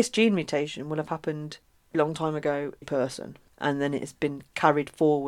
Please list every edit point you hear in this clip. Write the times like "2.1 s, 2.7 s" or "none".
1.9 s, 2.8 s